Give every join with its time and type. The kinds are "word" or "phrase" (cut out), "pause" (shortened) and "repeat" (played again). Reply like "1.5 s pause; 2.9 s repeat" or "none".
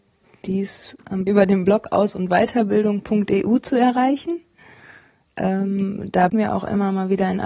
1.3 s word; 6.3 s word